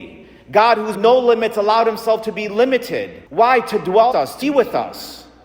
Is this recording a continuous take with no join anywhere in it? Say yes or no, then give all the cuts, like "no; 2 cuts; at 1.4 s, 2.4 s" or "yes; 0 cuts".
no; 4 cuts; at 0.9 s, 3.3 s, 4.1 s, 4.4 s